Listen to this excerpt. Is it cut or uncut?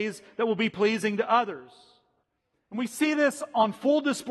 uncut